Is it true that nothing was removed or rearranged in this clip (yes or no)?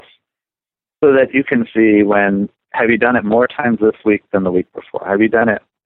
yes